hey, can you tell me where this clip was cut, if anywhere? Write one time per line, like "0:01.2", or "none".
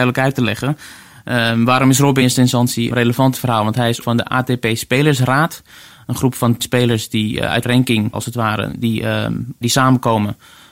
0:02.2
0:02.9
0:03.3
0:04.0
0:06.6
0:07.6
0:08.1
0:09.6